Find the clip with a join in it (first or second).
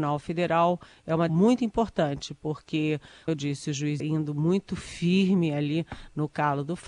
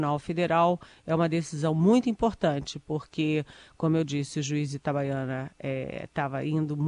first